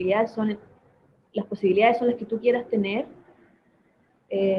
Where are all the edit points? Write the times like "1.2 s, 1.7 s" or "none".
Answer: none